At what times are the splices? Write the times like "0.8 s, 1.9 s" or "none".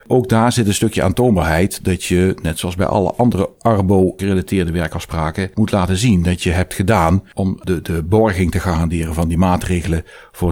none